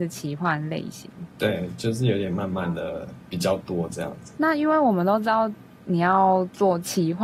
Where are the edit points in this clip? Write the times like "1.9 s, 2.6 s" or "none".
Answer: none